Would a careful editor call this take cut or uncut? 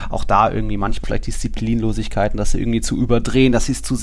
cut